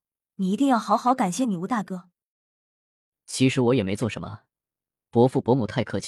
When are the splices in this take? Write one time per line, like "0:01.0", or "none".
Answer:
none